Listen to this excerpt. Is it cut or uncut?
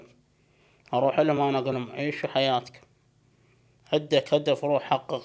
uncut